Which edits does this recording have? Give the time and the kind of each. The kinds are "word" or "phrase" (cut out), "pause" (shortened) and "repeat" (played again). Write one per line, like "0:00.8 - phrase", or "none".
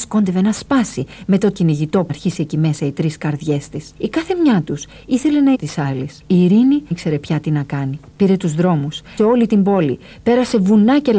0:01.5 - word
0:02.1 - word
0:04.0 - pause
0:05.5 - word
0:06.2 - pause
0:06.9 - word
0:08.1 - pause
0:09.2 - word